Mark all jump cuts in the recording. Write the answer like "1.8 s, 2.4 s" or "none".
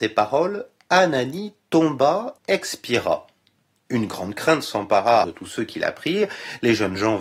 2.4 s, 5.2 s